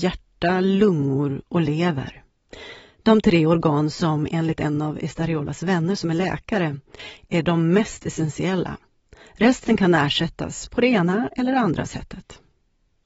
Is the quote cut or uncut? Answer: uncut